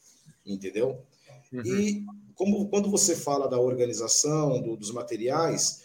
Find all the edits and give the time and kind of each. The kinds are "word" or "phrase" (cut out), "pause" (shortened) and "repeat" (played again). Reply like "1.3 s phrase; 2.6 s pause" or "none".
3.5 s word